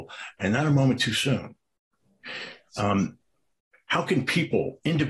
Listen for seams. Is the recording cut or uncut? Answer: uncut